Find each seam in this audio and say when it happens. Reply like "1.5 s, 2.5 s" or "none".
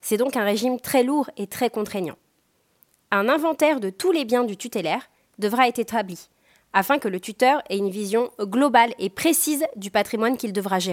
none

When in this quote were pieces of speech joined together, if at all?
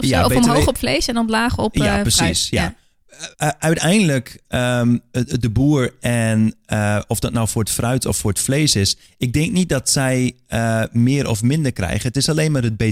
3.3 s

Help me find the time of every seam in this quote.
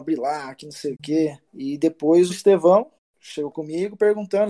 1.0 s, 1.5 s, 2.3 s, 3.0 s, 3.5 s

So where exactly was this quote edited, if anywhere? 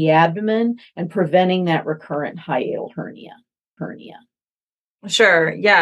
3.8 s

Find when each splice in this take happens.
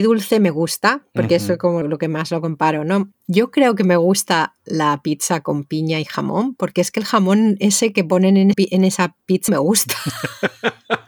1.8 s, 3.1 s, 8.5 s, 9.5 s

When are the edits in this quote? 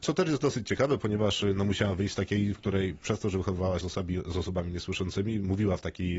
2.5 s, 3.8 s

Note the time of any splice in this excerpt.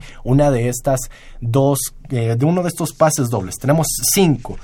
none

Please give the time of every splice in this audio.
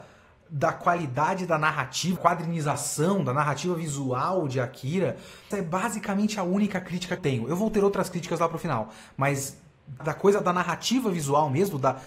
2.2 s, 5.5 s, 7.2 s, 10.0 s

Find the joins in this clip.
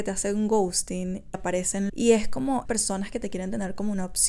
1.3 s, 1.9 s, 2.7 s

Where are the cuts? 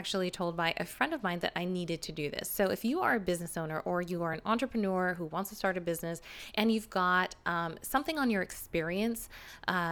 none

